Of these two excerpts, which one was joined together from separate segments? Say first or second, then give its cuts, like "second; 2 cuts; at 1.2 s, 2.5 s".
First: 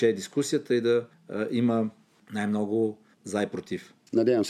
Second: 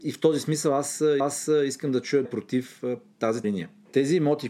second; 3 cuts; at 1.2 s, 2.2 s, 3.4 s